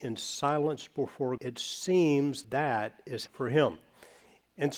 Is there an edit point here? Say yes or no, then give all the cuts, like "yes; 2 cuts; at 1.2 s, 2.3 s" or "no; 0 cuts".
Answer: yes; 3 cuts; at 1.4 s, 2.4 s, 3.3 s